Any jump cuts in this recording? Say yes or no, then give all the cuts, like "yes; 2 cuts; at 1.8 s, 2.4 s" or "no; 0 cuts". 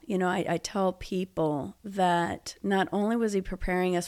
no; 0 cuts